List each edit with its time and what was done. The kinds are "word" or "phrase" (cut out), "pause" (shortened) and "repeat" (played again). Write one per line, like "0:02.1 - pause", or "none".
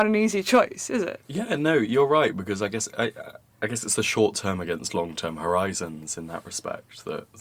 0:01.2 - pause